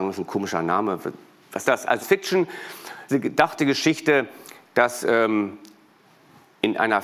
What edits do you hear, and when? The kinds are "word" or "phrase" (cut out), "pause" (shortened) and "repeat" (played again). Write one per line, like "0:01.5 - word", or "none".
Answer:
0:01.6 - word
0:02.0 - word
0:03.1 - word